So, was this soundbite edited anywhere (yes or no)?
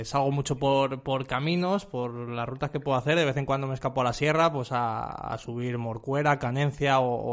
no